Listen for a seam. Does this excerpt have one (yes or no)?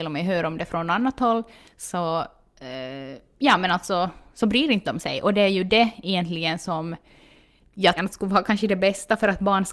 yes